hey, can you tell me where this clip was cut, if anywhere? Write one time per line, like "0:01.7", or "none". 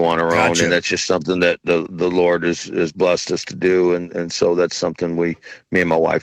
none